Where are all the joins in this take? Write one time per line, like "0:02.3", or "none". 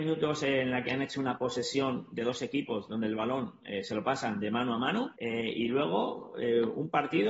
0:05.2